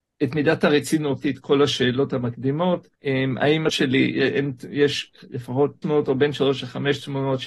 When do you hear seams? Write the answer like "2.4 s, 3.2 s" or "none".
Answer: 1.2 s, 3.0 s, 3.7 s, 5.8 s